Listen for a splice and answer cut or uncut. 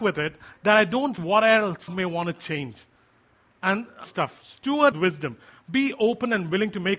cut